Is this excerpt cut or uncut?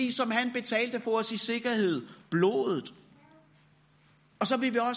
cut